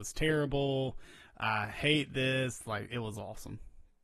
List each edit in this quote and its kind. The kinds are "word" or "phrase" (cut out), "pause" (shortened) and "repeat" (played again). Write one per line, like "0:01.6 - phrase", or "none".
none

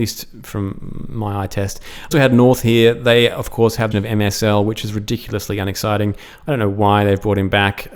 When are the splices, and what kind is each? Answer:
0:02.1 - word
0:03.9 - phrase

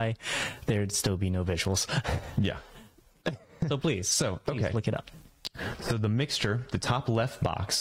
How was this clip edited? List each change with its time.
none

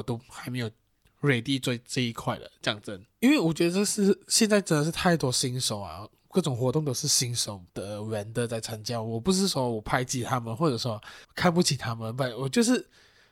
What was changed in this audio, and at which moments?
0:03.1 - pause
0:07.7 - pause
0:11.2 - pause

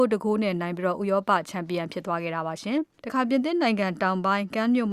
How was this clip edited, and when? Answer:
0:03.0 - pause

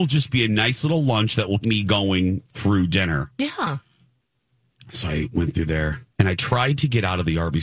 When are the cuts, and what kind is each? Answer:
0:01.6 - word
0:06.1 - pause

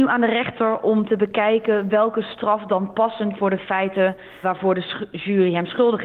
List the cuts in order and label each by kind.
0:03.4 - word
0:04.4 - word

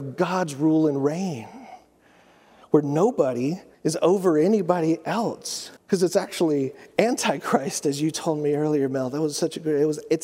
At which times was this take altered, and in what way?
0:03.7 - pause
0:05.8 - pause

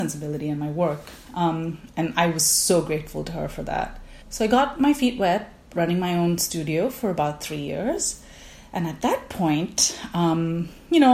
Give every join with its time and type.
0:04.2 - pause

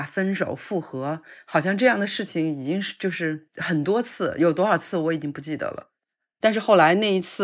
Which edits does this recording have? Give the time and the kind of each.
none

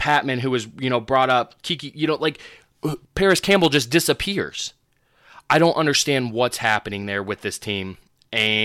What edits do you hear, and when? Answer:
0:03.0 - pause

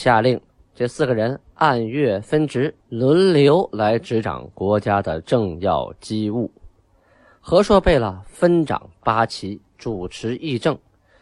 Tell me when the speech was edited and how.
0:02.8 - pause
0:09.7 - pause

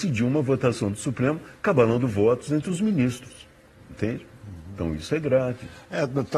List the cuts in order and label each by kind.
none

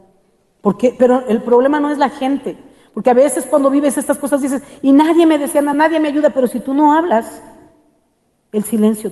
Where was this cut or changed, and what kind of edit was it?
none

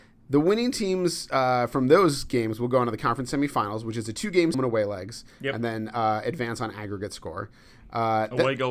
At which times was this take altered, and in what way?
0:04.5 - phrase

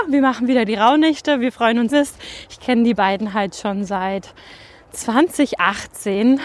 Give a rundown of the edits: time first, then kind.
0:01.9 - phrase

